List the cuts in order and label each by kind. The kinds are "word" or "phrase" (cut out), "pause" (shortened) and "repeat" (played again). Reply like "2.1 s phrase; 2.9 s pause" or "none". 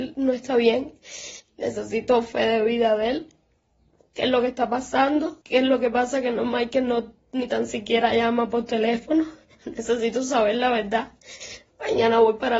5.4 s pause